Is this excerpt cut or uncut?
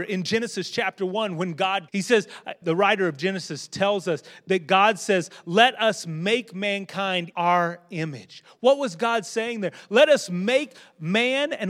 cut